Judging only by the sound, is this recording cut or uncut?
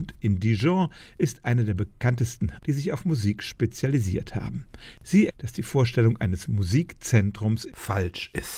cut